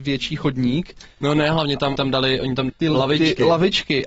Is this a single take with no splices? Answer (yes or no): no